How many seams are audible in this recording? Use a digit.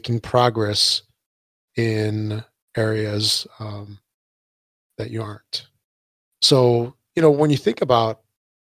0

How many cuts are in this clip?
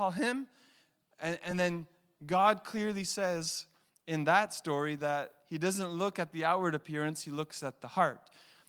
0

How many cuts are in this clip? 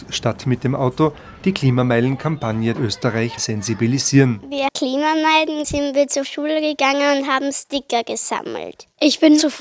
5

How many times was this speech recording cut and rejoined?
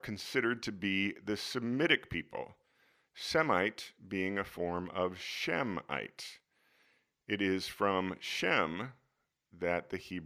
0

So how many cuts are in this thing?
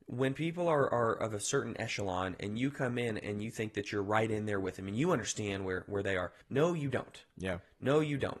1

